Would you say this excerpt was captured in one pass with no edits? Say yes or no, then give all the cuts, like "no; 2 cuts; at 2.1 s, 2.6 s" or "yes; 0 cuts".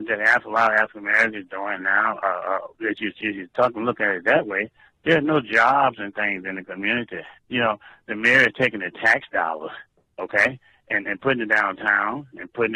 no; 1 cut; at 7.4 s